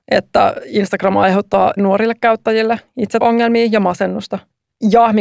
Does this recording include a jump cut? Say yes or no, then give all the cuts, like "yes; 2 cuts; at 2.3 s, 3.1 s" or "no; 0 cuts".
yes; 2 cuts; at 1.8 s, 3.2 s